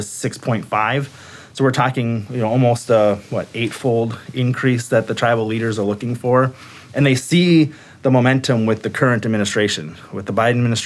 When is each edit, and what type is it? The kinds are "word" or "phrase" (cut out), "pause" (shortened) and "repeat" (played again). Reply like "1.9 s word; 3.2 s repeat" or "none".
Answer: none

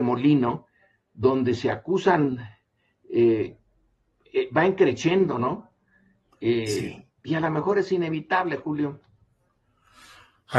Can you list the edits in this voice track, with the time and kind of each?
7.2 s pause

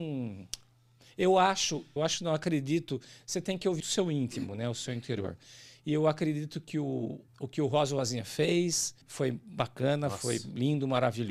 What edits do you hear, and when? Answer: 2.0 s word; 3.8 s word; 7.3 s pause; 9.0 s pause

